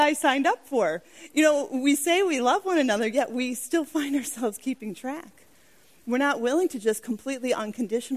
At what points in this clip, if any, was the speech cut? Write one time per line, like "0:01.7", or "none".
none

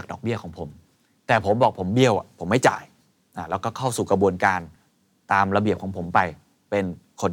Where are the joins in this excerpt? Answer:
none

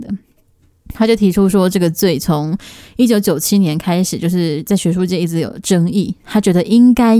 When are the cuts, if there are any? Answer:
none

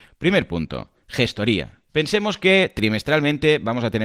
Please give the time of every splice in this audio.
0:01.9

